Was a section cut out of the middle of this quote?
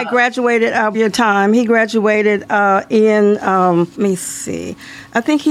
yes; 2 cuts; at 0.9 s, 4.0 s

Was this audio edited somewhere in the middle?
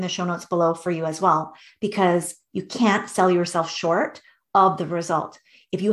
no; 0 cuts

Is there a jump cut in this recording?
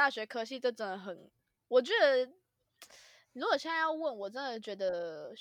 no; 0 cuts

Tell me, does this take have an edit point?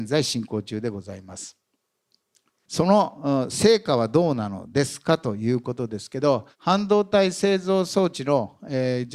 yes; 1 cut; at 6.5 s

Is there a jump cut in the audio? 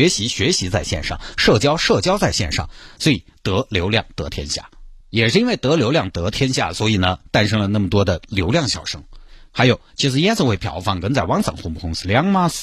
yes; 1 cut; at 5.0 s

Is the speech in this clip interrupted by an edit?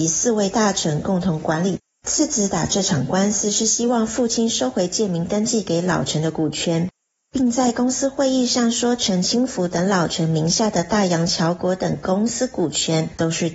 no; 0 cuts

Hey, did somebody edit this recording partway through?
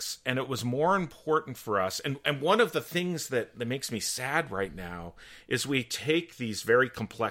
no; 0 cuts

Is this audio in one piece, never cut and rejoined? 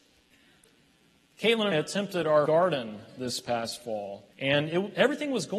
no; 3 cuts; at 1.7 s, 2.5 s, 4.3 s

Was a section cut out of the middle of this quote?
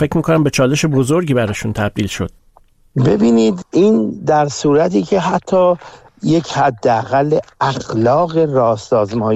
no; 0 cuts

